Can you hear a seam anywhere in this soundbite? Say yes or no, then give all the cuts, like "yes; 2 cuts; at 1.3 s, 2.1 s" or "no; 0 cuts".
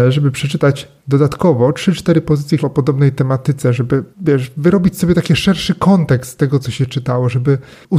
yes; 3 cuts; at 1.0 s, 2.6 s, 4.1 s